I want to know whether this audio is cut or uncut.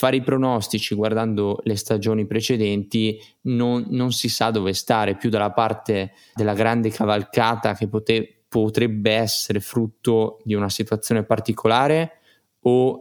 cut